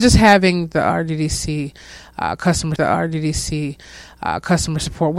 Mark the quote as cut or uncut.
cut